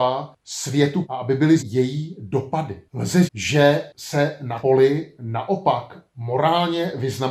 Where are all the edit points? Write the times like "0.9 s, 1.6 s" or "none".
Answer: 1.0 s, 1.6 s, 3.3 s, 4.6 s